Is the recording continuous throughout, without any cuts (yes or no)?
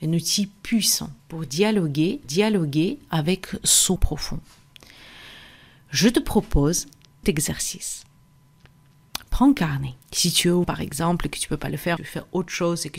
no